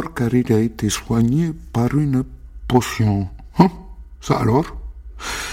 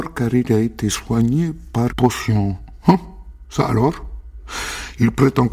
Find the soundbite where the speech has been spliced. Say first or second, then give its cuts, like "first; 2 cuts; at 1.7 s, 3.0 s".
second; 1 cut; at 1.9 s